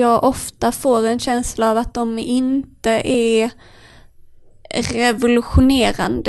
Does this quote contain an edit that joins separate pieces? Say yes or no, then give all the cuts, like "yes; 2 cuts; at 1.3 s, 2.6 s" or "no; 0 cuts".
no; 0 cuts